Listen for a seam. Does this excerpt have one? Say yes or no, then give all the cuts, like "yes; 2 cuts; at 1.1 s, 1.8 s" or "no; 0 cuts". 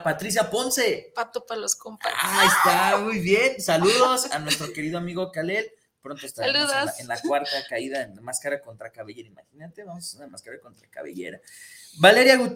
no; 0 cuts